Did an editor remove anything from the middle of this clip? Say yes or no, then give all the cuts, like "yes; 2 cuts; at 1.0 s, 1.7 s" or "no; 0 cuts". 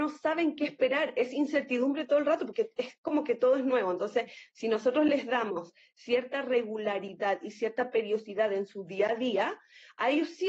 no; 0 cuts